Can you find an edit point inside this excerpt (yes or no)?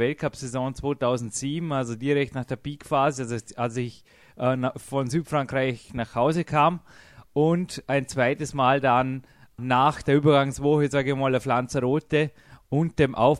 no